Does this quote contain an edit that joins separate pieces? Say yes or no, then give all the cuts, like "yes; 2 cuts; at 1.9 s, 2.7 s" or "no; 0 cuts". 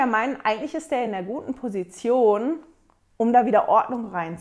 no; 0 cuts